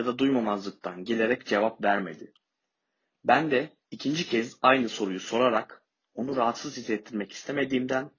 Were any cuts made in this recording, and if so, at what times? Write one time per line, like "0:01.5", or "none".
none